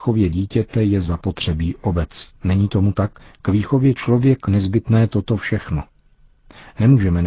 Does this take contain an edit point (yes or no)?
yes